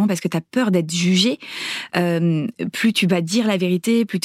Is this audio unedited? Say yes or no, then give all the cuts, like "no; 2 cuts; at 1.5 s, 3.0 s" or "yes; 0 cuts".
yes; 0 cuts